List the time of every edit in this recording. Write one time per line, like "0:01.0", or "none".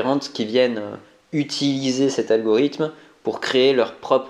none